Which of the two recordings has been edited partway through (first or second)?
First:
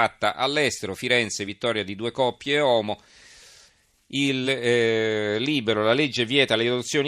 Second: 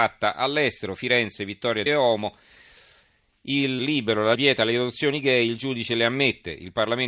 second